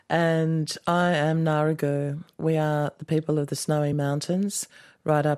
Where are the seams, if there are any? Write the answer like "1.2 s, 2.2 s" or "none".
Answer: none